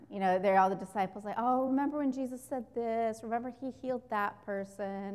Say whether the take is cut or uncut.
uncut